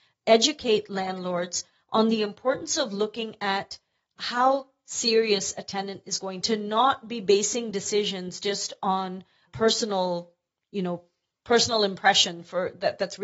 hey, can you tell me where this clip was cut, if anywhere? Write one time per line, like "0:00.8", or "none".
0:06.4